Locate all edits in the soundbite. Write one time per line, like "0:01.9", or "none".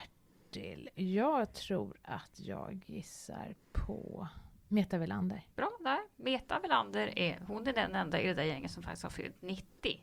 0:05.5